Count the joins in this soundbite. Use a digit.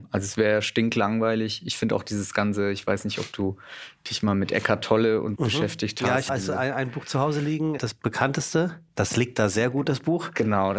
3